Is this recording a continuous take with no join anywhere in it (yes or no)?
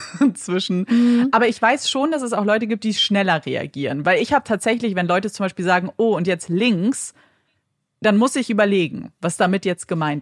yes